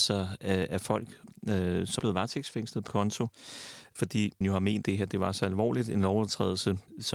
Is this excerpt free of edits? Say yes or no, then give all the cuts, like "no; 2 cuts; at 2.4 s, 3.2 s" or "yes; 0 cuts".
no; 4 cuts; at 2.0 s, 2.9 s, 4.4 s, 4.8 s